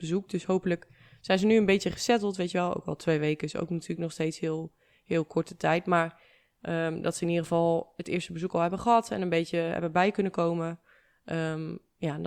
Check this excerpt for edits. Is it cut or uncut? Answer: uncut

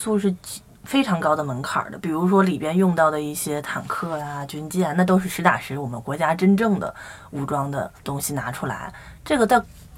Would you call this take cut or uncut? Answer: cut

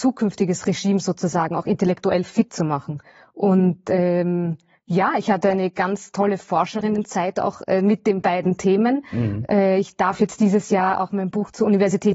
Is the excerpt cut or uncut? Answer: uncut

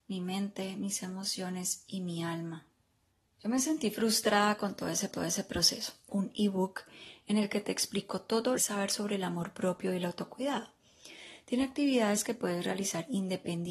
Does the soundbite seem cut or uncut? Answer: cut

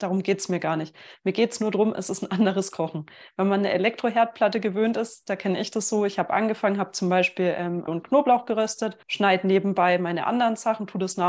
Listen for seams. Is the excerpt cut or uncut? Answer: cut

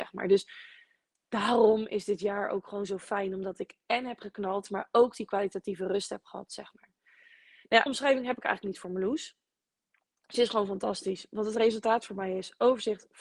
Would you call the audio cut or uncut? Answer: cut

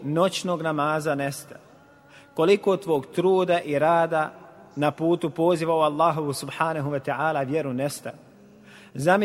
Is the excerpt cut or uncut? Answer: uncut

